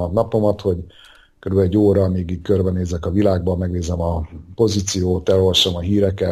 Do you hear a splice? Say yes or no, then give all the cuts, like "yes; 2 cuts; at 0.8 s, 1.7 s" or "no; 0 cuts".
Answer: no; 0 cuts